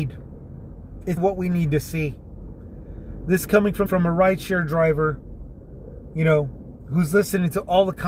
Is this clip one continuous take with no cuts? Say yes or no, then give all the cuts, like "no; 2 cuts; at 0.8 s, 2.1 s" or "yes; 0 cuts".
no; 2 cuts; at 1.2 s, 3.9 s